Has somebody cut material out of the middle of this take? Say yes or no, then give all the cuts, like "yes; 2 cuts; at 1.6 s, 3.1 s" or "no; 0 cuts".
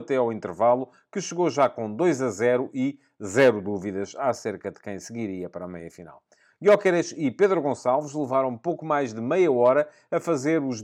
no; 0 cuts